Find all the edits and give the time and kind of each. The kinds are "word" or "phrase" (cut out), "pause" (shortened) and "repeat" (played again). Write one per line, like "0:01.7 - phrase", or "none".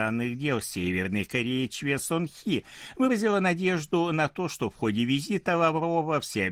none

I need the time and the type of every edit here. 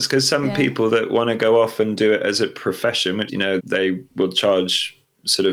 0:03.3 - phrase
0:03.6 - word

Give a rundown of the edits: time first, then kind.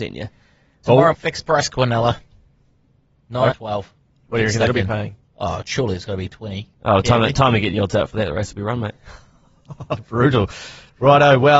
0:01.1 - word
0:03.5 - word
0:05.2 - pause

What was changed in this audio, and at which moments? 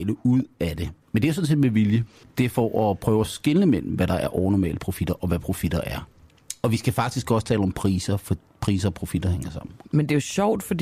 0:01.0 - pause
0:02.2 - pause
0:09.8 - pause

